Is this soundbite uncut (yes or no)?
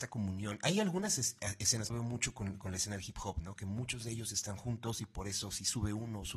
no